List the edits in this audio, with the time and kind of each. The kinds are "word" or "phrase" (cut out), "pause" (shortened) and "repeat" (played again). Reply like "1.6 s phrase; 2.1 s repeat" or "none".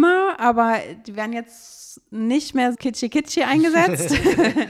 2.7 s word